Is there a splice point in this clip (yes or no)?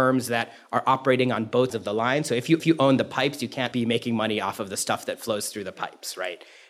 yes